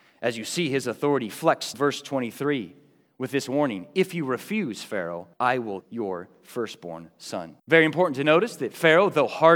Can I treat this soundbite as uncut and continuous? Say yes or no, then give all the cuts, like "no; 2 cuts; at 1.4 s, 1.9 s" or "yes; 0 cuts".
no; 4 cuts; at 1.7 s, 5.3 s, 5.8 s, 7.6 s